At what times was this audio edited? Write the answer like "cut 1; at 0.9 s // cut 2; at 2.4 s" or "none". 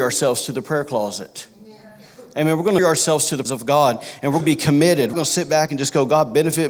cut 1; at 2.8 s // cut 2; at 3.5 s // cut 3; at 4.4 s // cut 4; at 5.1 s